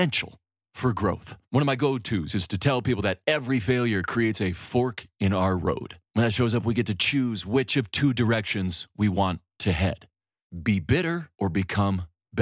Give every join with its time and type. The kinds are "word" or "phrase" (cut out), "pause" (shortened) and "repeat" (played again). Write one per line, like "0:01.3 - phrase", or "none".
0:01.4 - pause
0:06.1 - pause
0:11.3 - pause